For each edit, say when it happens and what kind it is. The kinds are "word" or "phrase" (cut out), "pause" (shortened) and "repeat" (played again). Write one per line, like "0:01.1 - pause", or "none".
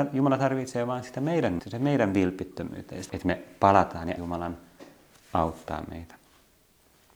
0:01.6 - word
0:03.1 - word
0:04.2 - word